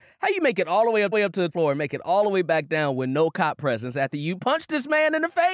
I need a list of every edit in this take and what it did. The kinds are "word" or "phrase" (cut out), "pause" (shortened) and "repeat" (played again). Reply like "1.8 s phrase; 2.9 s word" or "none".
1.1 s repeat; 1.5 s word